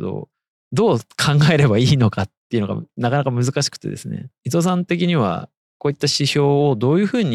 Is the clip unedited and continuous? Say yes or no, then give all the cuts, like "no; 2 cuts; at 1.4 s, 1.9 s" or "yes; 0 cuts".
yes; 0 cuts